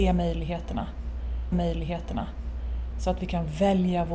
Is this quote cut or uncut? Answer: cut